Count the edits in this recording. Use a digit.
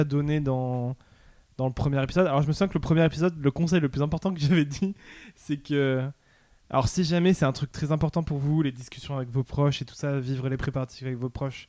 0